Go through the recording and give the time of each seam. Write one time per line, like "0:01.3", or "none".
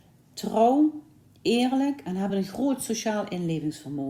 none